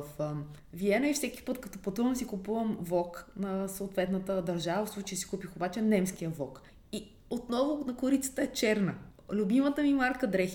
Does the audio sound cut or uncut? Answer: uncut